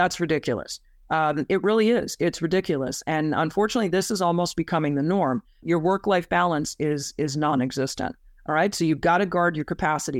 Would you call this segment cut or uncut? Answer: uncut